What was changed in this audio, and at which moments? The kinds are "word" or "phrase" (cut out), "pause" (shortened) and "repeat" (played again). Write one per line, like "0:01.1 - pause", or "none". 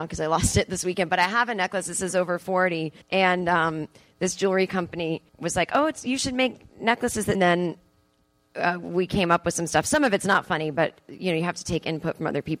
0:03.0 - pause
0:05.3 - pause
0:07.3 - phrase